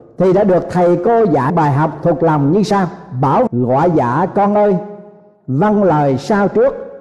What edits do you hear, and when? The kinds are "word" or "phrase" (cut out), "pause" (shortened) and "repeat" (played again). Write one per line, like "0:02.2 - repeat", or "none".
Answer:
0:01.5 - word
0:03.5 - word